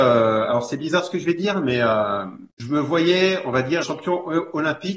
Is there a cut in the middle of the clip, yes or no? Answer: yes